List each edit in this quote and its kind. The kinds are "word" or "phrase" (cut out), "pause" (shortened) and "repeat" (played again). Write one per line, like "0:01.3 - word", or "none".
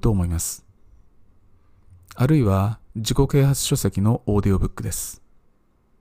0:02.9 - pause